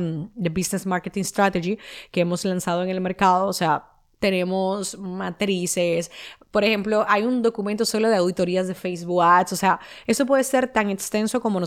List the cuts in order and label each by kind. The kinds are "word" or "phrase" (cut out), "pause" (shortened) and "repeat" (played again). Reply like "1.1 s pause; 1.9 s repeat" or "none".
none

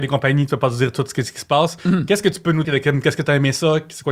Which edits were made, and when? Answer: 2.6 s word

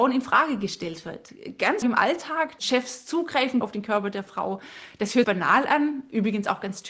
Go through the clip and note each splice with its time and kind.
1.8 s word; 2.6 s word; 3.6 s word; 5.2 s word

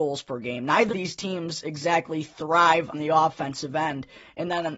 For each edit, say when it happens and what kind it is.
0.9 s word; 2.9 s word

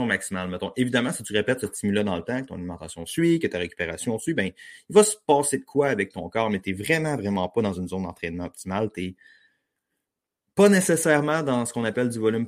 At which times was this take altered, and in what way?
none

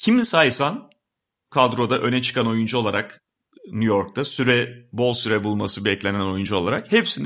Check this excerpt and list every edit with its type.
none

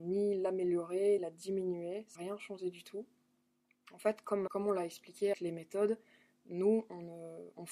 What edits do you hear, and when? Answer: 1.2 s word; 2.2 s word; 4.5 s word; 5.3 s word

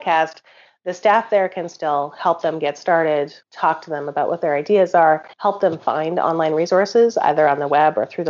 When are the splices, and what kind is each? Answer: 3.4 s pause; 5.3 s pause

